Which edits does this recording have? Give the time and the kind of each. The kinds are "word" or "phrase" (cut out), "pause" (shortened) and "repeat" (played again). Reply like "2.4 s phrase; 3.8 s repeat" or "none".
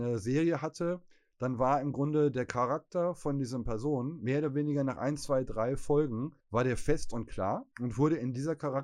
6.4 s pause; 7.7 s pause

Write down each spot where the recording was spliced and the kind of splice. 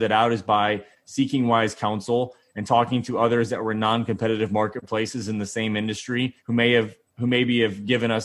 6.4 s pause

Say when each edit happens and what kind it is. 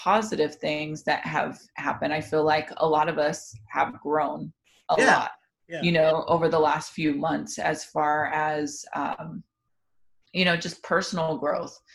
none

